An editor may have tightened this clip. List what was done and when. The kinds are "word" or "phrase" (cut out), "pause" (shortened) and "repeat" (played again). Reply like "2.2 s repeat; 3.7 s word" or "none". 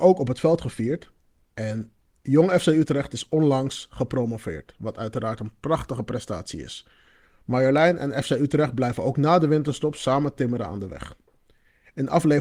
none

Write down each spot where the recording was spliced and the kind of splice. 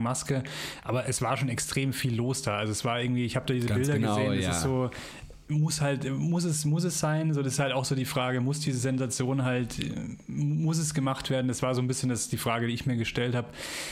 none

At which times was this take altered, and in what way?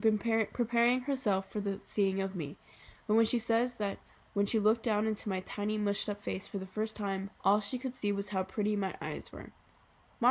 7.3 s pause

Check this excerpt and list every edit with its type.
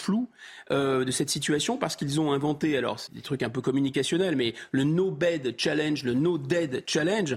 3.1 s word

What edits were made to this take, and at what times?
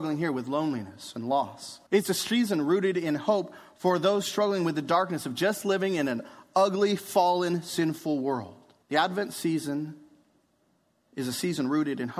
1.9 s pause; 8.8 s pause

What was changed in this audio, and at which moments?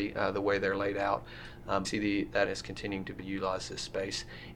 1.8 s word; 2.4 s word; 3.2 s word

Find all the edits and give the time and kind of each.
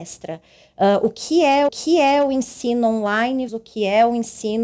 1.7 s repeat; 3.5 s word

